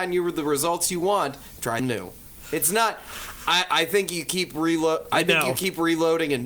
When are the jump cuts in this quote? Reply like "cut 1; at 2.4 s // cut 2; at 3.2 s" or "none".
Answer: cut 1; at 1.8 s